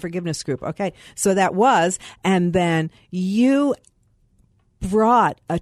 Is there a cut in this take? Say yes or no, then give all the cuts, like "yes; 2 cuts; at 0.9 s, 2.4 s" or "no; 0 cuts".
no; 0 cuts